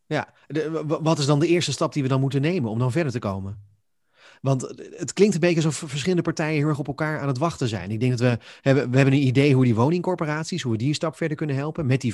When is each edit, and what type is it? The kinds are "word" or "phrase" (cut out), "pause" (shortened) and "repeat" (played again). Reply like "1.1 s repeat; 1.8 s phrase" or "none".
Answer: none